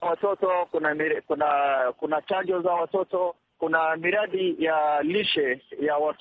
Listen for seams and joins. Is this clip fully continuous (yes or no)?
yes